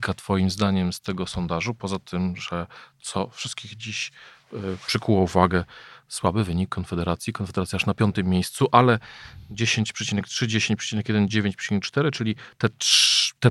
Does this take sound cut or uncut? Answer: uncut